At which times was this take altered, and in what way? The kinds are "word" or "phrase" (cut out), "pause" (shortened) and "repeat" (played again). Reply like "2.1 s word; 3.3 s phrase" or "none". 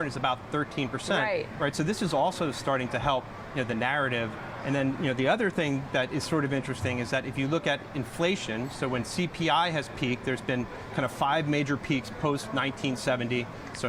none